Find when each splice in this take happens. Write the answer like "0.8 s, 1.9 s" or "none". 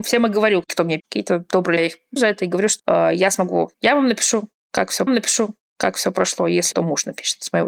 1.0 s, 1.8 s, 2.2 s, 2.8 s, 3.7 s, 5.1 s, 6.7 s